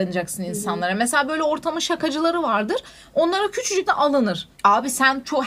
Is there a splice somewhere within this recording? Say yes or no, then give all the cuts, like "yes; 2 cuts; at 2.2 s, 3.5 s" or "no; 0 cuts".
yes; 2 cuts; at 3.9 s, 4.5 s